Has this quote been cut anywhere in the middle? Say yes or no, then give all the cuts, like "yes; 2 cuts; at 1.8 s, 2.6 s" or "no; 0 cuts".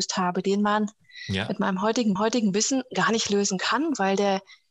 yes; 1 cut; at 2.2 s